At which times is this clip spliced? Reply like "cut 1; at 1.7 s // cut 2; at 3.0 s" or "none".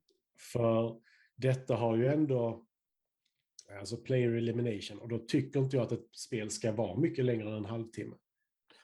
none

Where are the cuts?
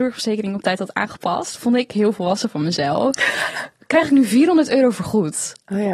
none

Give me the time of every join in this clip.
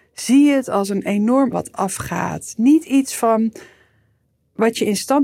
cut 1; at 1.5 s

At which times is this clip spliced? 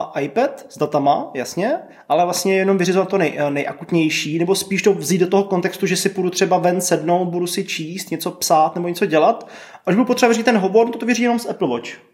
none

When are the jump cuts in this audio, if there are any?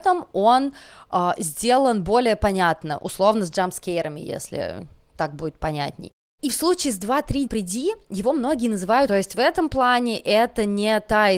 cut 1; at 7.5 s // cut 2; at 9.1 s

